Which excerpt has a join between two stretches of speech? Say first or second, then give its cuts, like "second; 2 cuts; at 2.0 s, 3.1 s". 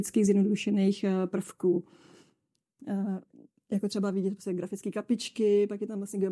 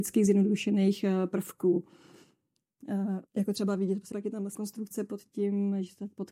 second; 3 cuts; at 3.3 s, 4.1 s, 4.5 s